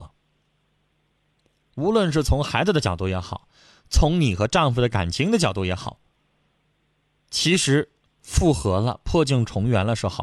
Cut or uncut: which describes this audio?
uncut